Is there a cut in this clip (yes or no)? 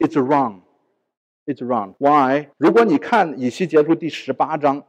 yes